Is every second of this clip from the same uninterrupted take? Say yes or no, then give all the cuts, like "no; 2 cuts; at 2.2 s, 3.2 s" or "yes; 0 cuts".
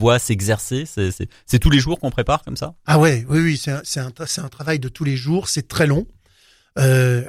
yes; 0 cuts